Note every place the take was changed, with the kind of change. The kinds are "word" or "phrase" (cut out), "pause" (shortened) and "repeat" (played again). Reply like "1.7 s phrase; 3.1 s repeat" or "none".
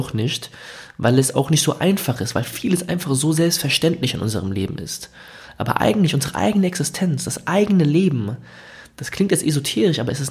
none